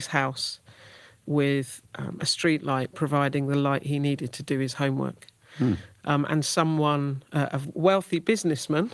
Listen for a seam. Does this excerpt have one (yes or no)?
no